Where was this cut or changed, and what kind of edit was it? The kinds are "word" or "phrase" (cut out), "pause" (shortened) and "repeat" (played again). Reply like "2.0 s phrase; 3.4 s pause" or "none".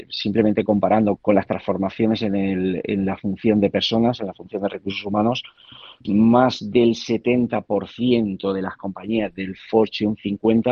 1.2 s word; 6.0 s word